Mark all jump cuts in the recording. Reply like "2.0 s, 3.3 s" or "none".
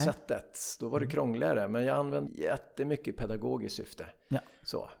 2.3 s